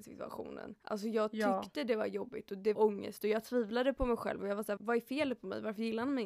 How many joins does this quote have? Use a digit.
2